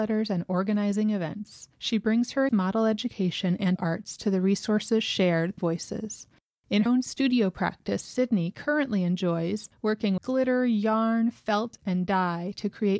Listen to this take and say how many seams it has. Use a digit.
6